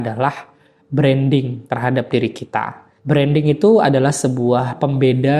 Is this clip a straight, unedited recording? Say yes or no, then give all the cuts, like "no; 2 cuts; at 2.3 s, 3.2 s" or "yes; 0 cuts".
no; 2 cuts; at 1.7 s, 3.0 s